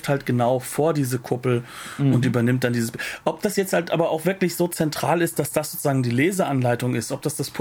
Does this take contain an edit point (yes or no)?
no